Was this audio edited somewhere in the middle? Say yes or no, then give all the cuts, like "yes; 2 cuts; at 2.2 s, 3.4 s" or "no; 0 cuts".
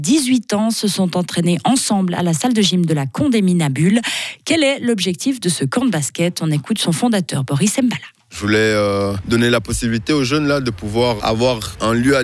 yes; 1 cut; at 11.2 s